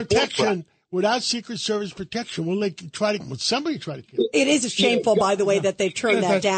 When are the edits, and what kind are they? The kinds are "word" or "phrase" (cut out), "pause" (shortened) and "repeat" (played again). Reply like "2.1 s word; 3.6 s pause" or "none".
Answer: 3.2 s word